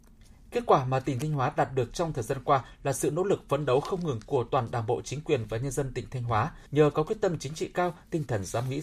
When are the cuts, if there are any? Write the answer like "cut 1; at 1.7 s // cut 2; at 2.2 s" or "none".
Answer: cut 1; at 6.7 s